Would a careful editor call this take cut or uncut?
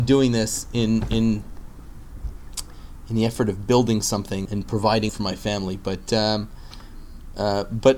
cut